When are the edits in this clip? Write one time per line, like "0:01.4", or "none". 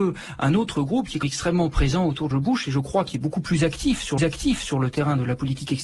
0:01.2
0:02.3
0:04.2